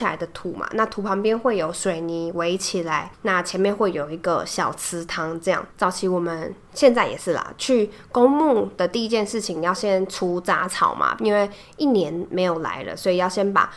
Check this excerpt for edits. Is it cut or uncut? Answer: cut